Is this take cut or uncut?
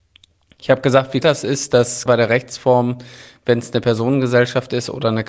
cut